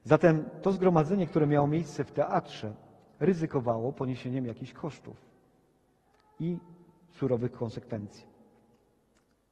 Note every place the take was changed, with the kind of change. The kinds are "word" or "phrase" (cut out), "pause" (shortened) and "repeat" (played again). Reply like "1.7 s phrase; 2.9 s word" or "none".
none

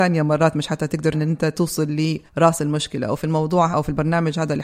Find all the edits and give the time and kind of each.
1.1 s word; 2.3 s pause; 3.7 s word

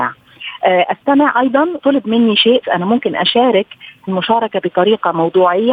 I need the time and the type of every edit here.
1.8 s word; 2.6 s word; 4.1 s word; 4.6 s word

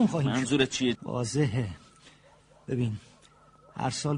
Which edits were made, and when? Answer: 1.0 s word

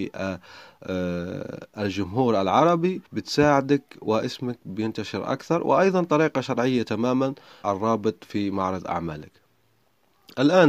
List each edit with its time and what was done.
3.1 s pause; 7.6 s phrase

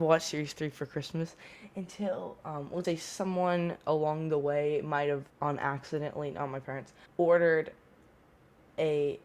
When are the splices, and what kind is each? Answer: 2.8 s word; 5.3 s pause; 7.1 s pause

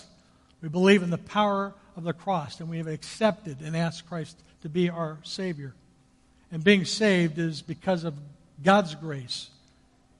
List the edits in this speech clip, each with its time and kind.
none

